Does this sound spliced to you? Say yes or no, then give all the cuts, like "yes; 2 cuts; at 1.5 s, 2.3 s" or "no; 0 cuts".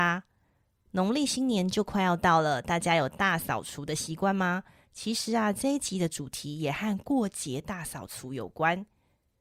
no; 0 cuts